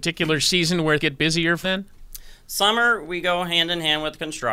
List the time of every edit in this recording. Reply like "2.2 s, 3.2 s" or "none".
1.0 s, 1.6 s